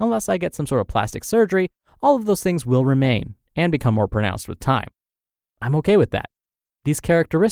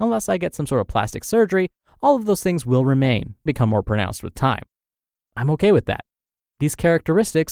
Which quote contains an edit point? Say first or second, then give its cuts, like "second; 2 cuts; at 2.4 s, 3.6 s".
second; 1 cut; at 3.5 s